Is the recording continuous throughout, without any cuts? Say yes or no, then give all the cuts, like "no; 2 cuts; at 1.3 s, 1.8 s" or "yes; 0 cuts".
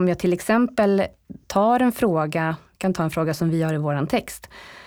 yes; 0 cuts